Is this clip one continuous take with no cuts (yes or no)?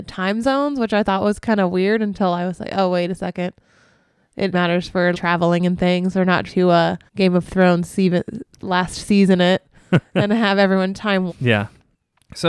no